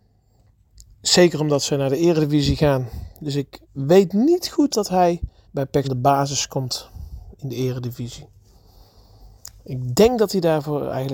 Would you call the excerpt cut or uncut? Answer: cut